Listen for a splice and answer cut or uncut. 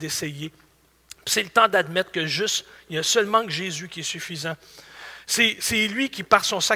uncut